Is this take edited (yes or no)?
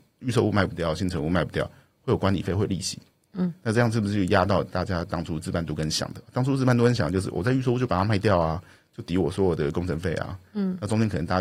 no